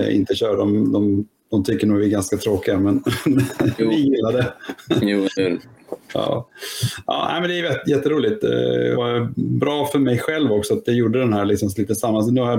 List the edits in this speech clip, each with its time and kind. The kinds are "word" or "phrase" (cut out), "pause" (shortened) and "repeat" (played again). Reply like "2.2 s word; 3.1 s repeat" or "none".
8.9 s word